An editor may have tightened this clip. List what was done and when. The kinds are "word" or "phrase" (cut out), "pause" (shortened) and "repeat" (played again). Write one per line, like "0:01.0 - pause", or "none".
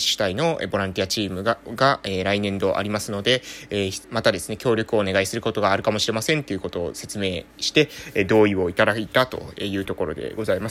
0:04.0 - pause